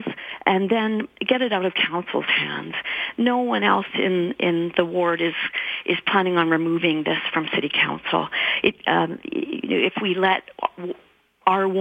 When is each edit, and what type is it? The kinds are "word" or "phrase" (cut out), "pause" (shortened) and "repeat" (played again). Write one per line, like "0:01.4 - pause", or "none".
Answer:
none